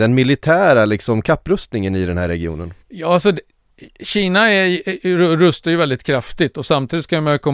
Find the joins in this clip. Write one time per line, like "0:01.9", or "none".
0:02.8